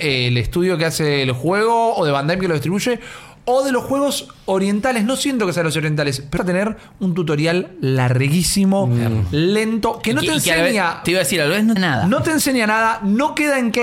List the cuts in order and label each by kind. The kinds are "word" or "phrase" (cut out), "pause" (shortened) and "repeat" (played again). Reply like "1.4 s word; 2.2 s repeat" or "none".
6.4 s word; 11.8 s word